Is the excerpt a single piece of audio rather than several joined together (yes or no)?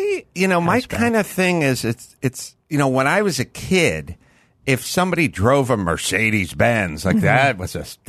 no